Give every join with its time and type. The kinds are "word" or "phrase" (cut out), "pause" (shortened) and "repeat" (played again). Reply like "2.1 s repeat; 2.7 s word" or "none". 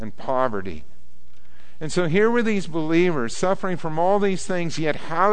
none